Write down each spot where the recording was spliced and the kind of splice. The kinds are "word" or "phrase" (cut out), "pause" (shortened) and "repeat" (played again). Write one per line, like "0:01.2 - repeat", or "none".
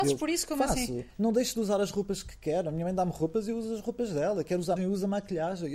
0:04.8 - word